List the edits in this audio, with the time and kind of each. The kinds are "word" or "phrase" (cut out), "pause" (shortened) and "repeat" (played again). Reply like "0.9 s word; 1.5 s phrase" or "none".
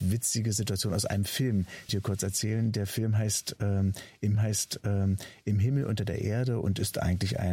1.9 s phrase; 4.3 s repeat